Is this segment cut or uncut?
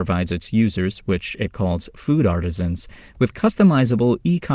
uncut